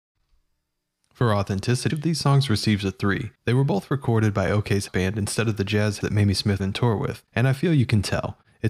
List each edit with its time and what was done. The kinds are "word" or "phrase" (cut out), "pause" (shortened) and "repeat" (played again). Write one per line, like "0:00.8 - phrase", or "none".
0:01.9 - word
0:03.3 - pause
0:04.9 - word
0:06.0 - word
0:06.6 - phrase
0:07.3 - pause